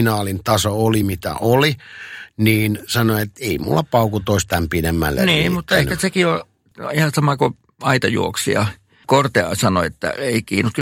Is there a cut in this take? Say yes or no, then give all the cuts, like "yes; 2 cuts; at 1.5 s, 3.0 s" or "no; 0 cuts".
no; 0 cuts